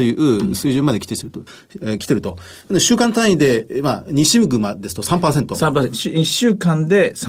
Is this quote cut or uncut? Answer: uncut